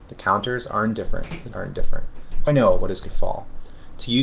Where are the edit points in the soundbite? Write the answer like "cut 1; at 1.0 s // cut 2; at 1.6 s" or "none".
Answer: cut 1; at 1.5 s // cut 2; at 2.5 s // cut 3; at 3.0 s